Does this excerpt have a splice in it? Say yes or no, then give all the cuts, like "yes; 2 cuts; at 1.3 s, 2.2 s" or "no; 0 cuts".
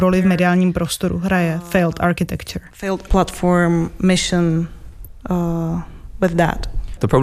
yes; 1 cut; at 3.1 s